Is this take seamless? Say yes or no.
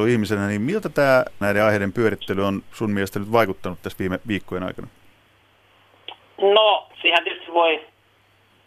no